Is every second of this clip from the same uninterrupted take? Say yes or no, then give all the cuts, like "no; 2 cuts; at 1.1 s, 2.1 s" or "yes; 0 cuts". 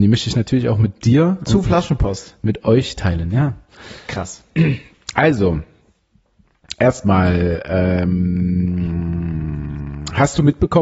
yes; 0 cuts